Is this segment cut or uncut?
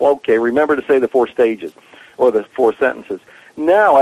uncut